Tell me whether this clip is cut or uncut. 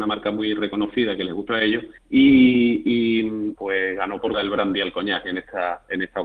cut